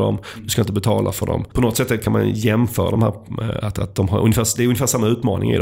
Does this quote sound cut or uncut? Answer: uncut